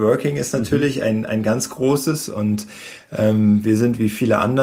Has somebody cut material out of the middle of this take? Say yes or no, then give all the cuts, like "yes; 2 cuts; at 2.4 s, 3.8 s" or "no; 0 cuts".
no; 0 cuts